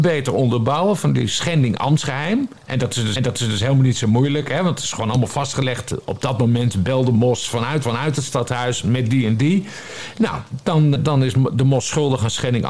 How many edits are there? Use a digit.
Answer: 4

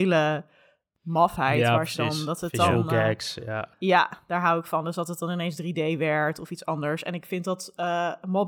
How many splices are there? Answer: 1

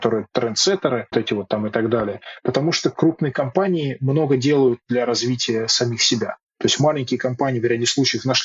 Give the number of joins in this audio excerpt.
1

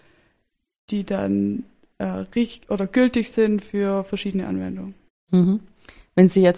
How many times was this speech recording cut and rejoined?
0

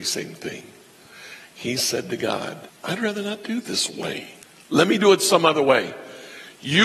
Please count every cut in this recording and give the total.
3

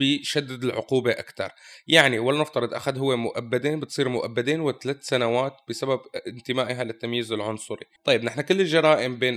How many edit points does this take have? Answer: 1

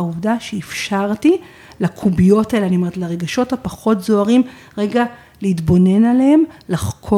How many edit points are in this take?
0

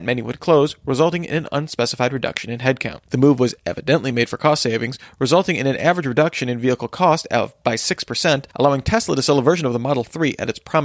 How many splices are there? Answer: 2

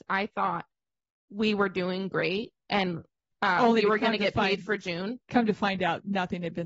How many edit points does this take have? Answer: 1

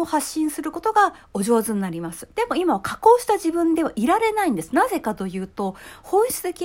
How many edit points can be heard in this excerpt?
1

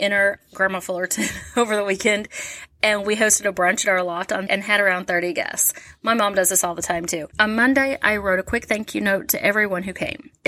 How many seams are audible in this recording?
2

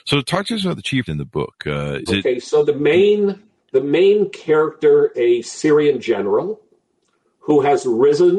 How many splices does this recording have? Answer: 4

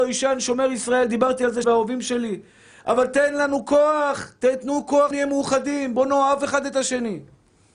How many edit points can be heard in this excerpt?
2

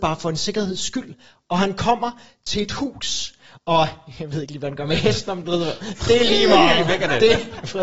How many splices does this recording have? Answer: 0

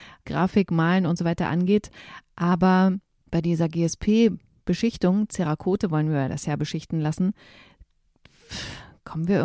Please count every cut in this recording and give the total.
0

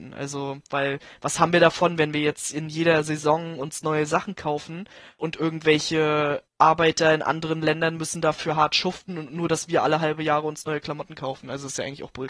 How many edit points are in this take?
1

